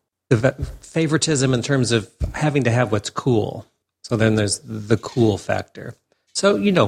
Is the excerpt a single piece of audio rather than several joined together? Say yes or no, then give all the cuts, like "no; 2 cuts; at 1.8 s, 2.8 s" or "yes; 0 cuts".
yes; 0 cuts